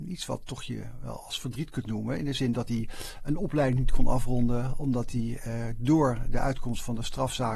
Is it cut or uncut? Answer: uncut